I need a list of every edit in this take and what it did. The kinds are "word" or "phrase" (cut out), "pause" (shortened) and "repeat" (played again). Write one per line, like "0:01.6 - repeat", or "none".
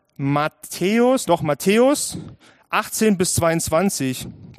0:01.2 - word